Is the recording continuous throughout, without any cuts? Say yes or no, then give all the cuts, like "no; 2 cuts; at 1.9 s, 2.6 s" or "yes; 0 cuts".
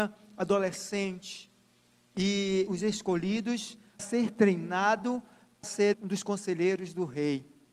no; 4 cuts; at 2.7 s, 4.0 s, 5.6 s, 5.9 s